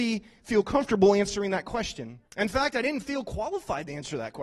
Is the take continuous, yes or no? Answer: no